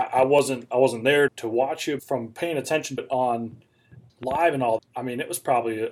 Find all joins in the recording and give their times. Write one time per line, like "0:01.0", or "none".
0:01.3
0:02.0
0:03.0
0:04.1
0:04.8